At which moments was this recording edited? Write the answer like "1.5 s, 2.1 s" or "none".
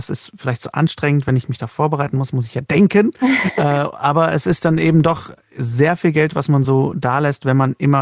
none